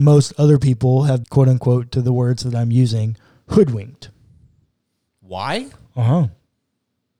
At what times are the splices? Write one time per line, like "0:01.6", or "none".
0:01.2

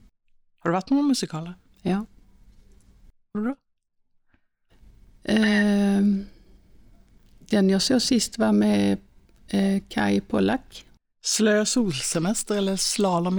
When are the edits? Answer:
0:03.3

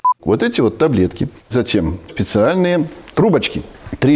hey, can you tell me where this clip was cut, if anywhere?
0:01.5
0:02.1

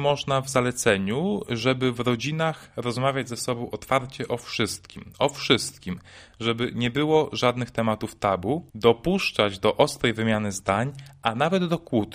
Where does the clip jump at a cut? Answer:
0:08.7

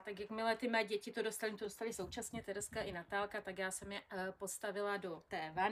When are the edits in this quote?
none

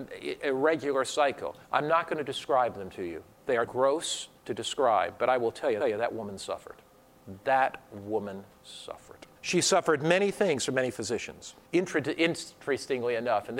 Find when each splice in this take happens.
0:01.6
0:03.7
0:04.4
0:05.8
0:09.4
0:11.7

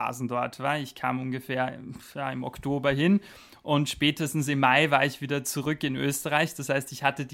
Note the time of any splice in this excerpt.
none

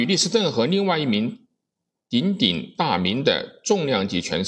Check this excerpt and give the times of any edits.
none

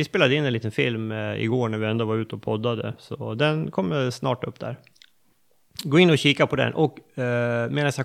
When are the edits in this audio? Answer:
0:05.3

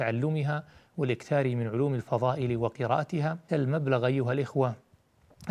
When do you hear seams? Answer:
0:03.5

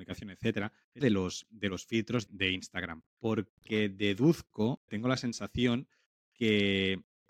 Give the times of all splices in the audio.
0:01.0
0:02.3
0:03.1
0:04.9

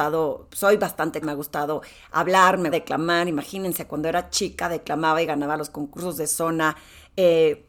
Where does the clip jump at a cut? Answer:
0:01.2
0:02.7

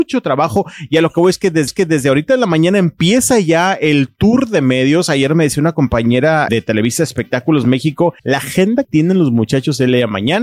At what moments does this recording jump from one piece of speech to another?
0:01.7
0:06.5
0:08.2
0:08.8

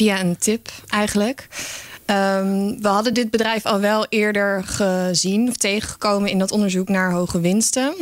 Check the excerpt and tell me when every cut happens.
none

